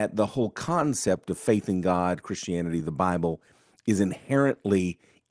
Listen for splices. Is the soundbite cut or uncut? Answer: uncut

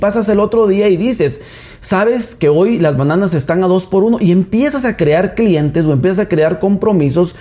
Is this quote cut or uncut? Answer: uncut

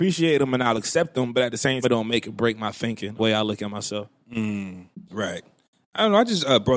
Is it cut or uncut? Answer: cut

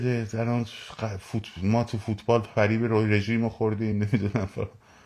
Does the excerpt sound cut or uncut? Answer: uncut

